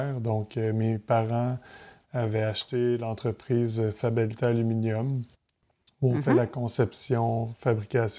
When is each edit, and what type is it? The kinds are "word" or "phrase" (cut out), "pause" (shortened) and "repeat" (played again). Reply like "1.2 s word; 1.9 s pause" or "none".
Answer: none